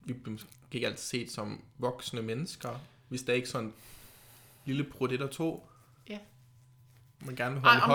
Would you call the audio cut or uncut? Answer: uncut